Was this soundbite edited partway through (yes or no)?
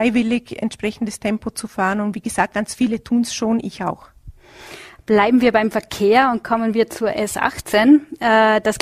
no